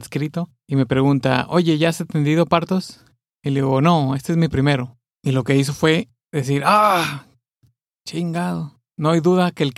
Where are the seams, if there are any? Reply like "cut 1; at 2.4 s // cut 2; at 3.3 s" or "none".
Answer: none